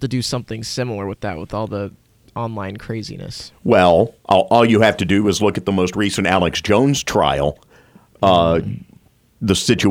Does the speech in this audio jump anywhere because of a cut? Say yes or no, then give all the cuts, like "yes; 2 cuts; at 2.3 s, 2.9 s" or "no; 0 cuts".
no; 0 cuts